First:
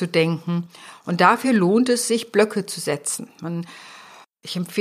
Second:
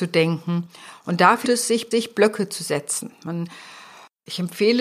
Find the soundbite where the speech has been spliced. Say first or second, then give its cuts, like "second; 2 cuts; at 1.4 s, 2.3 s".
second; 2 cuts; at 1.4 s, 1.9 s